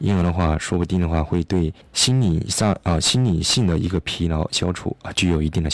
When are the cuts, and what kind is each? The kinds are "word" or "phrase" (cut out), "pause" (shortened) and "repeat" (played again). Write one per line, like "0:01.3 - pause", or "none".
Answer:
0:01.8 - pause